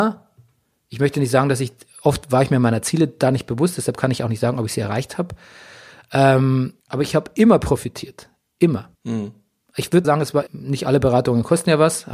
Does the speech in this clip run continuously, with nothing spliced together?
no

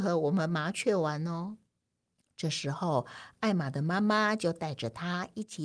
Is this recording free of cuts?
no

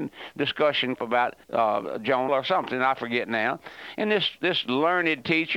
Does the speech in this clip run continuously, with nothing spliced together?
no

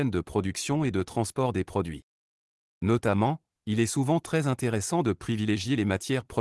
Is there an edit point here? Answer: no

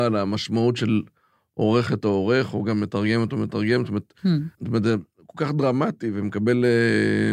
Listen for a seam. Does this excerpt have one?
yes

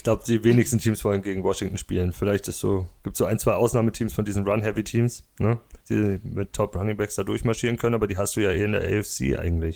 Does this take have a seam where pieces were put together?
yes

